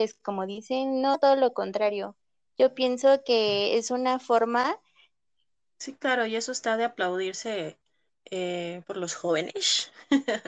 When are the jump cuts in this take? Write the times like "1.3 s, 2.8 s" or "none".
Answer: none